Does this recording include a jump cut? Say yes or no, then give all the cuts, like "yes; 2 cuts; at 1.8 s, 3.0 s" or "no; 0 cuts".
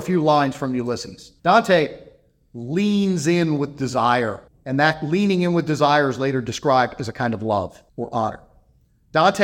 yes; 3 cuts; at 1.4 s, 4.5 s, 7.9 s